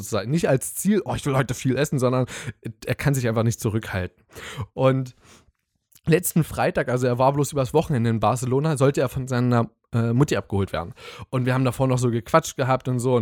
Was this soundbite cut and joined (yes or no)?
no